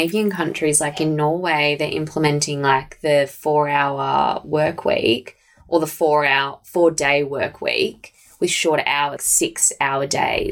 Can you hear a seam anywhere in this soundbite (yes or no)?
yes